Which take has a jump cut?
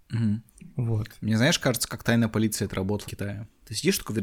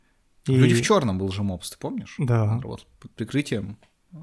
first; 1 cut; at 3.1 s

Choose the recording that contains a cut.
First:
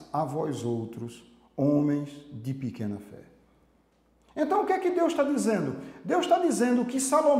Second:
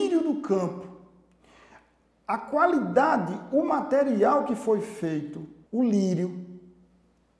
second; 1 cut; at 5.7 s

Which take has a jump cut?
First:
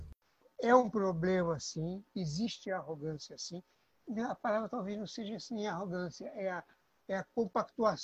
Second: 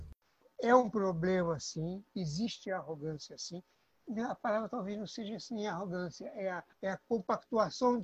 second; 1 cut; at 6.7 s

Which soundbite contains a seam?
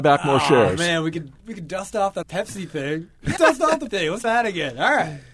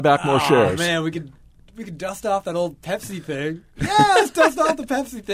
first; 5 cuts; at 1.4 s, 2.2 s, 3.4 s, 3.9 s, 4.2 s

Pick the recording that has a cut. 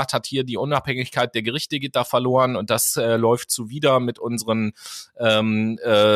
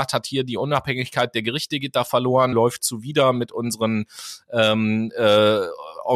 second; 1 cut; at 2.5 s

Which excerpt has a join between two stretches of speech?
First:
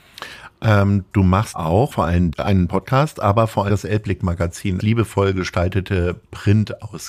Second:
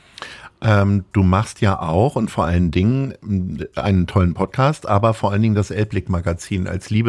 first; 6 cuts; at 1.5 s, 1.9 s, 2.3 s, 2.7 s, 3.7 s, 4.8 s

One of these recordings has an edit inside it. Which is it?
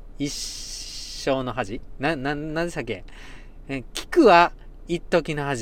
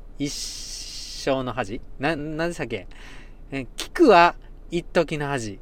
second; 1 cut; at 2.2 s

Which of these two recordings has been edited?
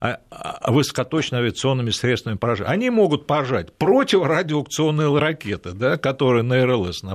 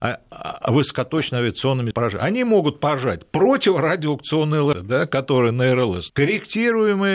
second; 3 cuts; at 1.9 s, 4.7 s, 6.1 s

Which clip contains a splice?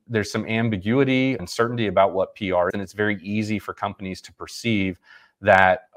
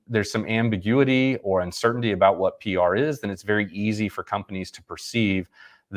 first; 2 cuts; at 1.4 s, 2.7 s

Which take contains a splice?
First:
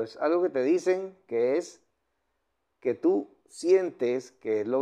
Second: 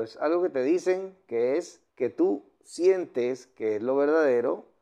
second; 1 cut; at 1.9 s

